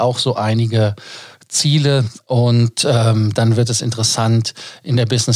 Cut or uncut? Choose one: uncut